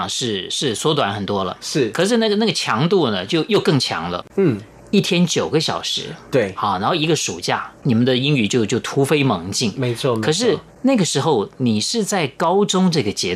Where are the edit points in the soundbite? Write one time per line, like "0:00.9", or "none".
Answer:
0:10.7